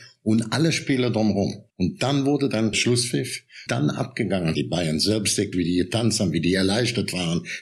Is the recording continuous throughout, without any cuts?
no; 5 cuts; at 1.7 s, 2.7 s, 3.7 s, 4.5 s, 5.5 s

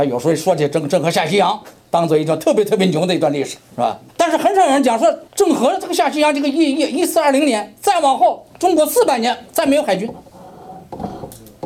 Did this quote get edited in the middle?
yes; 3 cuts; at 3.6 s, 4.1 s, 5.3 s

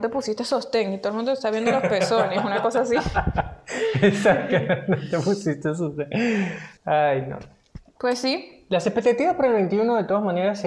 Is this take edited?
yes; 1 cut; at 6.8 s

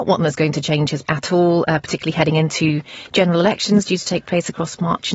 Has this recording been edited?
yes; 1 cut; at 1.0 s

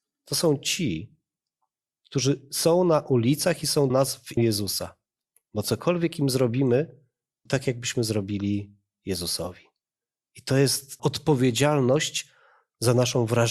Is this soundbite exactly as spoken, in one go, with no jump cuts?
no; 4 cuts; at 3.9 s, 4.4 s, 7.5 s, 11.0 s

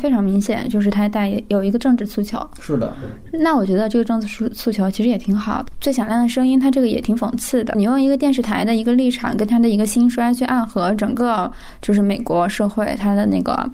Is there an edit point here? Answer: no; 0 cuts

